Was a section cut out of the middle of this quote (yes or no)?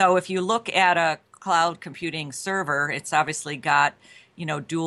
no